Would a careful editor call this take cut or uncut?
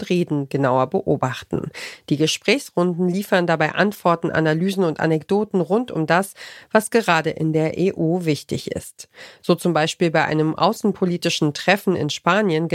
uncut